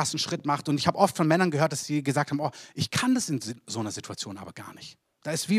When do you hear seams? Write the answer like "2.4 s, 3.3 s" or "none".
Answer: none